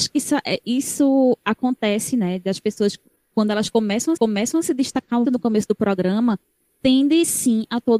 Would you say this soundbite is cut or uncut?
cut